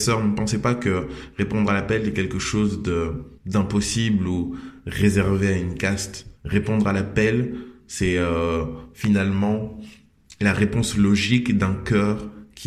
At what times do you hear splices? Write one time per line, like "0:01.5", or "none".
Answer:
0:03.4
0:06.4